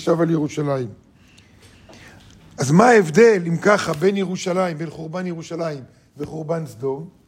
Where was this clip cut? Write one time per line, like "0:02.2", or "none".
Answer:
none